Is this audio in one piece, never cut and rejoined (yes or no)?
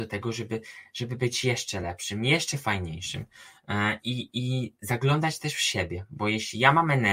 yes